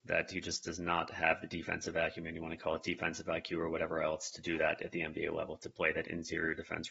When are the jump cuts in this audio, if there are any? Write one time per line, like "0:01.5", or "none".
none